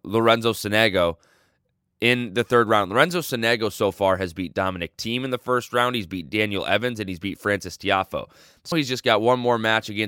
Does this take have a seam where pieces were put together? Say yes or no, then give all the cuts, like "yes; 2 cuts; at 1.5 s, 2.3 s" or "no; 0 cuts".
yes; 1 cut; at 8.7 s